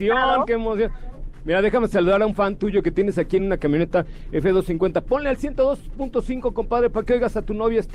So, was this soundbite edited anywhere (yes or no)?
no